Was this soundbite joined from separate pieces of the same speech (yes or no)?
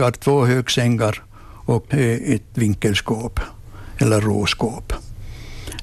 yes